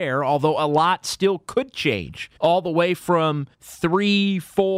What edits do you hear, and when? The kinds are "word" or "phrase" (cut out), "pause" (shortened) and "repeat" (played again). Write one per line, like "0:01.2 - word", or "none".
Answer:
0:02.4 - pause
0:03.5 - pause